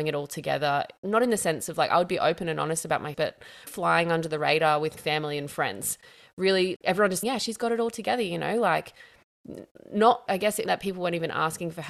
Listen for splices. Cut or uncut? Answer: cut